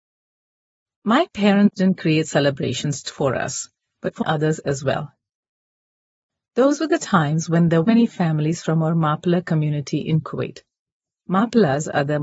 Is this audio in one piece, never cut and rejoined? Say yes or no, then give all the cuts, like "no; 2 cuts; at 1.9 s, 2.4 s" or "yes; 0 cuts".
no; 3 cuts; at 3.0 s, 4.2 s, 7.8 s